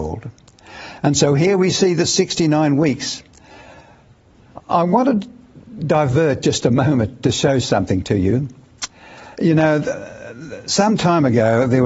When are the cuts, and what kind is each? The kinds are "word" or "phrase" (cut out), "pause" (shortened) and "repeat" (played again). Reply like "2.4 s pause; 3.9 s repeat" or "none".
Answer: 9.3 s pause